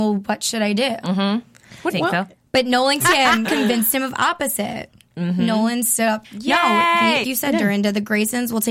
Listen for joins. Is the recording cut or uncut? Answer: cut